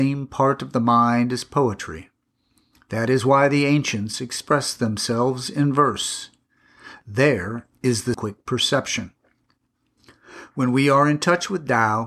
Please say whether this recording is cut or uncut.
cut